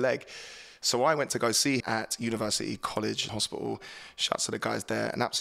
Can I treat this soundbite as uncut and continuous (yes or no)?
no